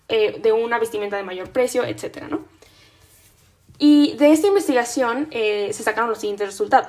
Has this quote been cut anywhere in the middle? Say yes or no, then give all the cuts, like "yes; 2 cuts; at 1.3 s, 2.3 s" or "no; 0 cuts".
no; 0 cuts